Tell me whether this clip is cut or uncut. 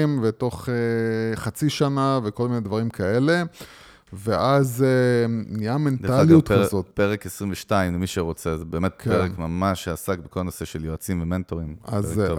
uncut